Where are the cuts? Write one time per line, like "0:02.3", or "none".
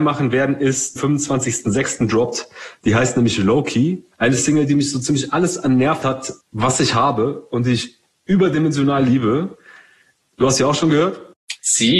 0:01.0
0:04.1
0:06.0
0:06.4